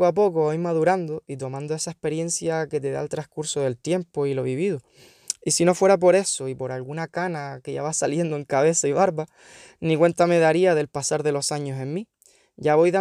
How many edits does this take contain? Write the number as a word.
zero